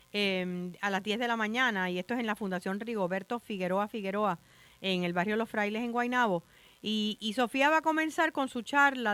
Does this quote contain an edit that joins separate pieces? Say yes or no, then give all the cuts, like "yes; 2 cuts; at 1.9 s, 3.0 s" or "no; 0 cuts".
no; 0 cuts